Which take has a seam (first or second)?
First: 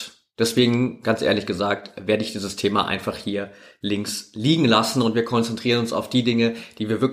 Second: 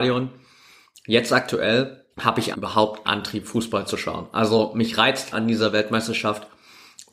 second